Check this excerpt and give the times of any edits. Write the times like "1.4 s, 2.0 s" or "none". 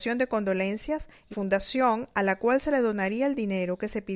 1.3 s